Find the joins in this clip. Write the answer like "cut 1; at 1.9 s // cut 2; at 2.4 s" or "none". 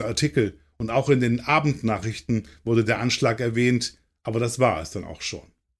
none